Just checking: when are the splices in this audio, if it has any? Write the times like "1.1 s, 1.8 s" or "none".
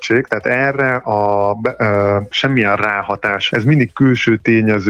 2.3 s, 3.5 s

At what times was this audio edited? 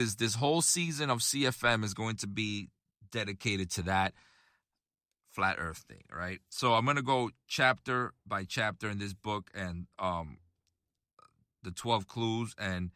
6.5 s

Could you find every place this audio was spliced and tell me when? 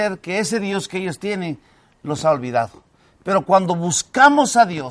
none

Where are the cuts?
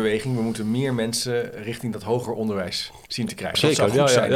3.0 s

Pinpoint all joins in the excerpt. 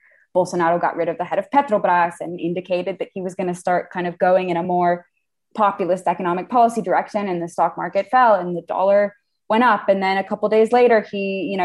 none

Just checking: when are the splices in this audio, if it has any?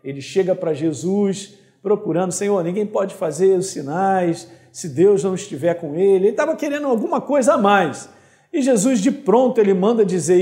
none

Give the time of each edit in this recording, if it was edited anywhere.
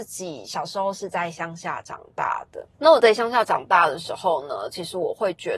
2.7 s

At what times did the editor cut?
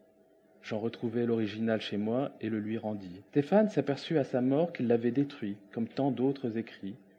3.3 s

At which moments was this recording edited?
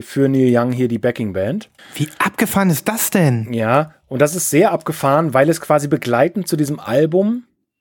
1.8 s

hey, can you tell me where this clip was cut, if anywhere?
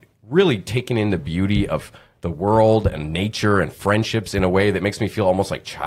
none

